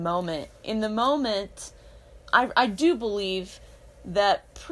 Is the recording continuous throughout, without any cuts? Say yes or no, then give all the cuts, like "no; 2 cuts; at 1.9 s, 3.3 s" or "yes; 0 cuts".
no; 1 cut; at 2.2 s